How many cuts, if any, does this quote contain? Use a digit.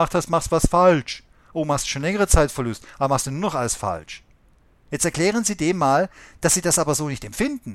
0